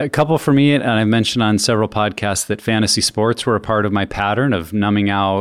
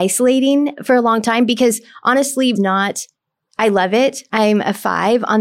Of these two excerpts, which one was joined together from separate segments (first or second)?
second